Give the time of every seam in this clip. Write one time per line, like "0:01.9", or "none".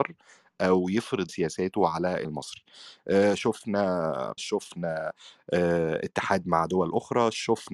0:01.3
0:02.2
0:04.4